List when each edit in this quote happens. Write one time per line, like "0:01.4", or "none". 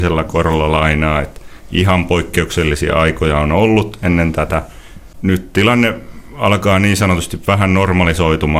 none